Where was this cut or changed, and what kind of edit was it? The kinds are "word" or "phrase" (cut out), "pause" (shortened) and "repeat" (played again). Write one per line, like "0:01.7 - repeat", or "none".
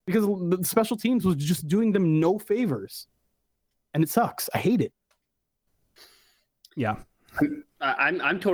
none